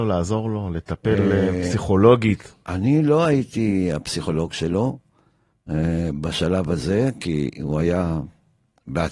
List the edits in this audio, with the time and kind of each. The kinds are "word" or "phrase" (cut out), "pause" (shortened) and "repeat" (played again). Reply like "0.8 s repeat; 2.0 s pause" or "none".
none